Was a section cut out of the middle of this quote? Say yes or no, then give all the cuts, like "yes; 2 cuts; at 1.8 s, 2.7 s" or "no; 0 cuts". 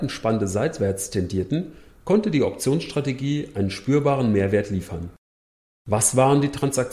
no; 0 cuts